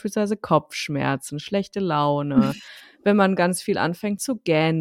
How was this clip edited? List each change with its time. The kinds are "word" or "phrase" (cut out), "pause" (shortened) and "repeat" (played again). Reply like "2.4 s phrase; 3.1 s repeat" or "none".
none